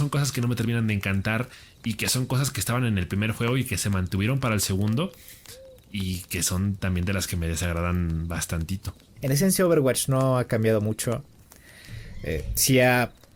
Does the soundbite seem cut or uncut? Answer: uncut